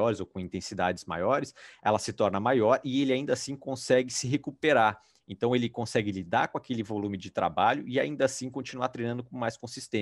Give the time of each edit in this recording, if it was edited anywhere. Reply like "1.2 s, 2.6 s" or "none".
none

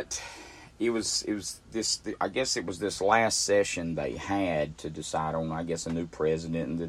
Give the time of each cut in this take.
none

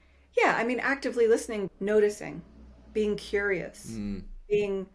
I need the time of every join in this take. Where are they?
1.7 s

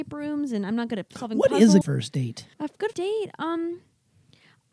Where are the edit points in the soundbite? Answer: 1.8 s, 2.5 s, 2.9 s

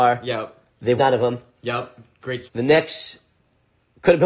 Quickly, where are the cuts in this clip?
1.0 s, 2.4 s

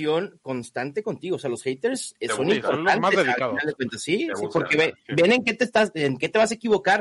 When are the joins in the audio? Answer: none

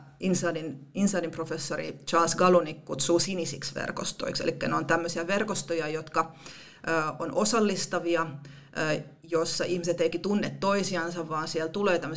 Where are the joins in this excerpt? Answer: 10.1 s

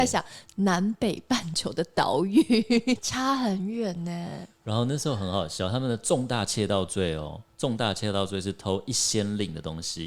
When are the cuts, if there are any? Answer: 3.0 s

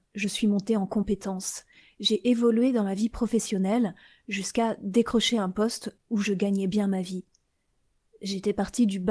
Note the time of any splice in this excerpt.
none

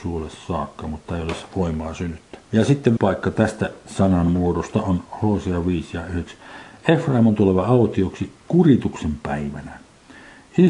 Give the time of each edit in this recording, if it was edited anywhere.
2.4 s, 3.0 s

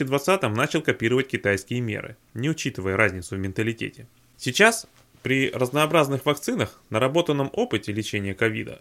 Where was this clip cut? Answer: none

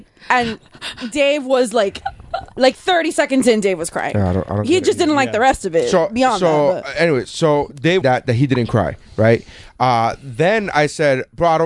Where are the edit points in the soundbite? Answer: 8.0 s

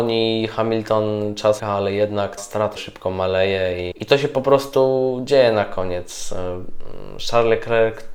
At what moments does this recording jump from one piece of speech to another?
1.6 s, 2.4 s, 2.8 s, 3.9 s

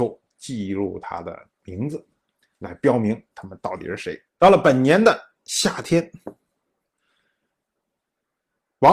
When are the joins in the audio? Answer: 4.3 s

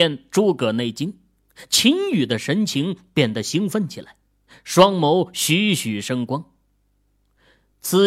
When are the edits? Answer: none

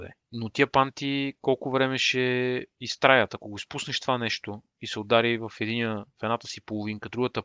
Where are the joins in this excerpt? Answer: 4.7 s

